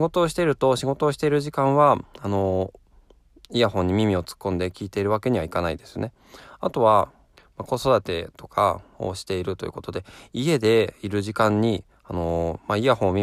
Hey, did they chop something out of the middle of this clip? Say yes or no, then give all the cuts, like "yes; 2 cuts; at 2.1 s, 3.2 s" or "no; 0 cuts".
yes; 1 cut; at 7.3 s